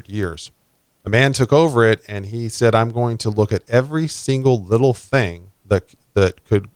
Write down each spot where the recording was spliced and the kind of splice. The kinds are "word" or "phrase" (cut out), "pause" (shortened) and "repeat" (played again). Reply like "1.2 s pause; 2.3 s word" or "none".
5.6 s pause